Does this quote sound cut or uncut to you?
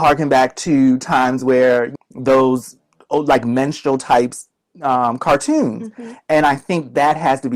cut